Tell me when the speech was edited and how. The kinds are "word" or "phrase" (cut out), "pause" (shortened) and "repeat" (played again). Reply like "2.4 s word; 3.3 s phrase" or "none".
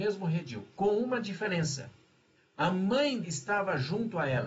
2.4 s pause; 3.2 s phrase